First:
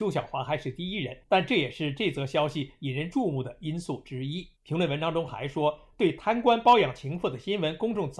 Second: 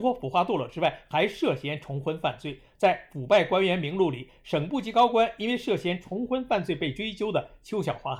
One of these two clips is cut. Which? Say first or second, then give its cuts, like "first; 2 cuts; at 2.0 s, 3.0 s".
first; 2 cuts; at 1.2 s, 4.6 s